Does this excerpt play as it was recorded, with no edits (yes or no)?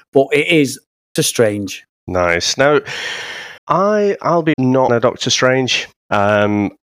no